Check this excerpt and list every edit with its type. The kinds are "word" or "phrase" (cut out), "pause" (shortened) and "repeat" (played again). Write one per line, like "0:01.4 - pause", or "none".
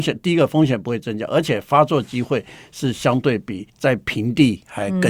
0:03.7 - pause